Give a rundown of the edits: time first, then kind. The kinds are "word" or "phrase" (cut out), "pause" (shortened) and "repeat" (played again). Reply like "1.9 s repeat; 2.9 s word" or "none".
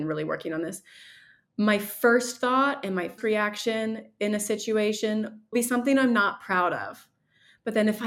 3.2 s word; 5.5 s word